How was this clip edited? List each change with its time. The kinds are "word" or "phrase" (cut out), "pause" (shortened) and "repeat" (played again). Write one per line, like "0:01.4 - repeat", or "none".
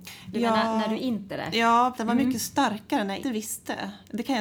0:01.3 - word
0:02.0 - word
0:03.2 - word